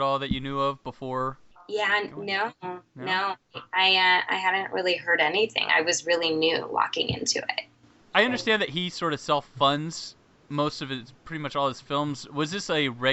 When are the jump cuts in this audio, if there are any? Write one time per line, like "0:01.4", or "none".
none